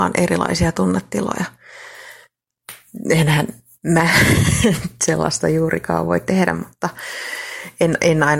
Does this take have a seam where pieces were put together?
no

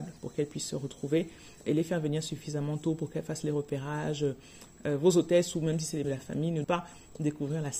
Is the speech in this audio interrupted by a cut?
yes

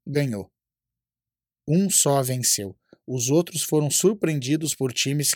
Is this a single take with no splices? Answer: yes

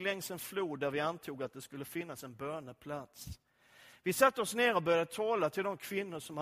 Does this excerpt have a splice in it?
no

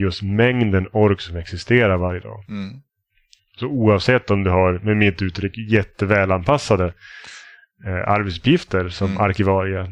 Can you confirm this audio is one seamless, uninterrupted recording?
yes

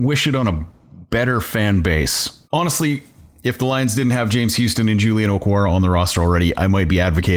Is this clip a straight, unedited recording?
no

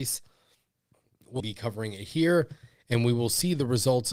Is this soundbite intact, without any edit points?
no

